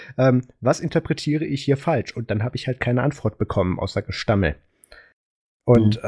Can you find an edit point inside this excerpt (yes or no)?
no